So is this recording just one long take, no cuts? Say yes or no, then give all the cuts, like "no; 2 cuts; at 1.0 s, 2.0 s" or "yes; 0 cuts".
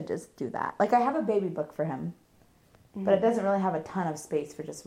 yes; 0 cuts